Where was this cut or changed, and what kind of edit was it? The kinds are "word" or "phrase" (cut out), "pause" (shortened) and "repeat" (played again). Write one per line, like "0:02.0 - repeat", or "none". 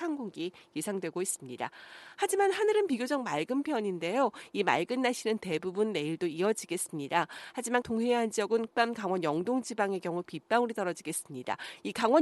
0:07.8 - phrase
0:08.7 - phrase